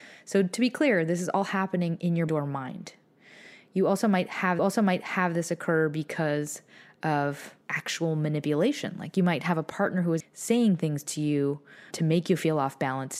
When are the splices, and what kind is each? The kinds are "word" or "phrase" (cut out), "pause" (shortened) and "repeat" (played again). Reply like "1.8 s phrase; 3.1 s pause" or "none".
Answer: 2.3 s phrase; 4.6 s repeat; 7.6 s pause; 10.2 s word; 11.9 s word